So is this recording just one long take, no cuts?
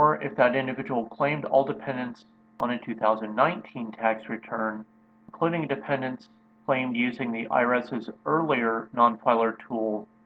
yes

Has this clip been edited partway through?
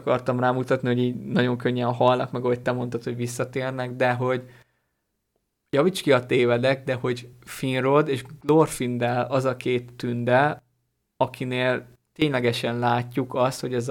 no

